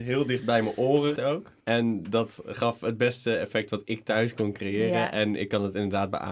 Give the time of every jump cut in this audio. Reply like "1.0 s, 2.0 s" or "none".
1.2 s, 1.6 s